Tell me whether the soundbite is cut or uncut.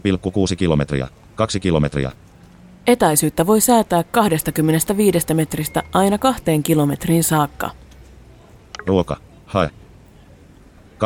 uncut